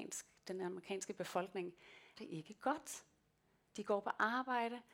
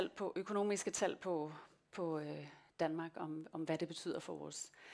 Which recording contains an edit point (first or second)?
first